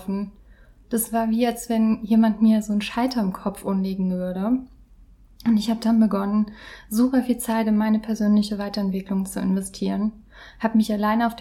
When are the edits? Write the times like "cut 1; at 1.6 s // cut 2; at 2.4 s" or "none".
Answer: none

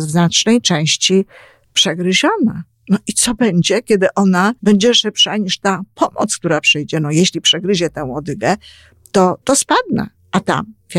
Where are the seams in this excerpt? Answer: cut 1; at 1.6 s // cut 2; at 4.6 s // cut 3; at 9.4 s

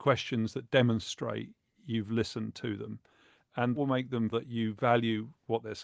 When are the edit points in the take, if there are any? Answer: cut 1; at 3.8 s // cut 2; at 4.3 s

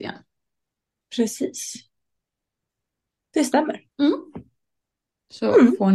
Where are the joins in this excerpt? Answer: cut 1; at 3.9 s

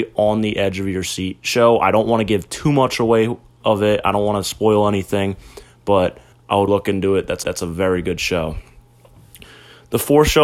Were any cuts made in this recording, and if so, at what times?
cut 1; at 6.3 s // cut 2; at 6.7 s // cut 3; at 7.4 s

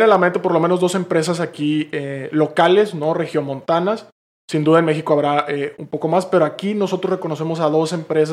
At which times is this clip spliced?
none

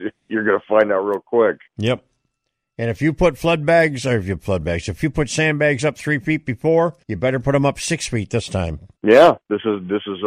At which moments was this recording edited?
cut 1; at 1.7 s // cut 2; at 7.0 s // cut 3; at 9.0 s

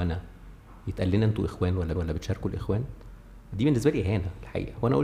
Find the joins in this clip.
cut 1; at 2.0 s

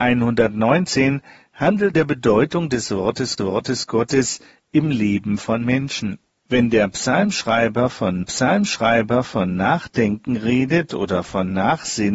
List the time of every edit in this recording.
cut 1; at 1.9 s // cut 2; at 3.4 s // cut 3; at 6.3 s // cut 4; at 8.2 s

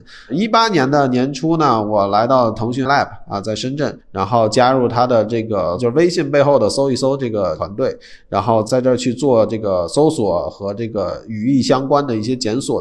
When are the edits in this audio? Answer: cut 1; at 2.9 s // cut 2; at 4.0 s

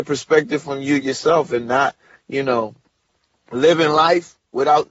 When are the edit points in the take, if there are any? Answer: none

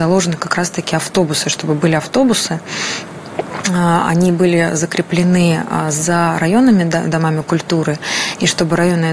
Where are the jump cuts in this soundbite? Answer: none

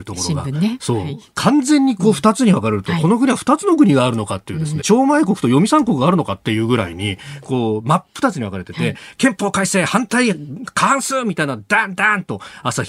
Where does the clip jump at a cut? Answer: cut 1; at 4.8 s

